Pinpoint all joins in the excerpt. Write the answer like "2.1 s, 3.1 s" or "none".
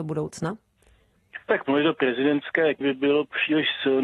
1.4 s, 2.8 s